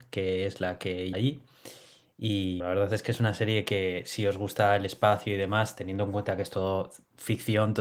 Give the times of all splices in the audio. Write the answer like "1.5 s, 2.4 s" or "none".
1.1 s, 2.6 s